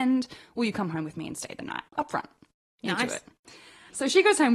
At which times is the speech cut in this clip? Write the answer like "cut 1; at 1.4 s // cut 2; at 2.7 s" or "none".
cut 1; at 1.9 s